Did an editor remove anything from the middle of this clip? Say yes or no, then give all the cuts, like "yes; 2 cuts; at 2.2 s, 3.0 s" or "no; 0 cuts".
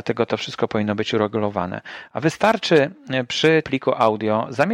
yes; 1 cut; at 3.6 s